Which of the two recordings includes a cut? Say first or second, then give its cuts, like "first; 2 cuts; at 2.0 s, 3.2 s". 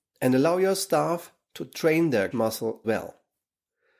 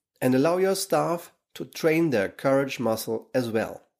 first; 2 cuts; at 2.3 s, 2.8 s